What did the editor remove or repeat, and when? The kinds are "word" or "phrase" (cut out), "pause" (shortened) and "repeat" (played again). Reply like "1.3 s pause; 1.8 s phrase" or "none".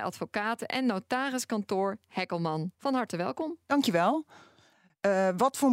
2.7 s pause